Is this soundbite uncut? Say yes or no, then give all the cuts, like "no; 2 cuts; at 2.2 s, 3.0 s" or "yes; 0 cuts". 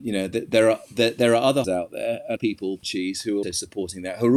no; 4 cuts; at 1.6 s, 2.4 s, 2.8 s, 3.4 s